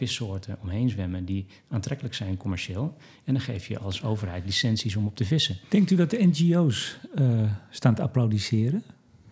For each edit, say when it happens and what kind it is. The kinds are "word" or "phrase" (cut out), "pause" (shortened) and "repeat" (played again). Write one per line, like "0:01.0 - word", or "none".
none